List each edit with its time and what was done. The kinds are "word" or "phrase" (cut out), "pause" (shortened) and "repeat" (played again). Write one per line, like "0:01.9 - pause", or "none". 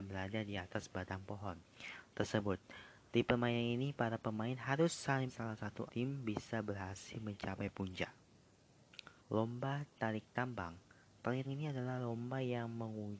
0:05.3 - phrase
0:05.9 - word
0:09.2 - pause
0:11.4 - word